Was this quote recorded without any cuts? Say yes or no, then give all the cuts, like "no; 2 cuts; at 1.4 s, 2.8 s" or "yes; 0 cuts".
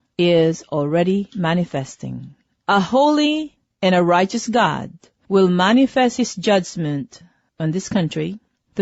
yes; 0 cuts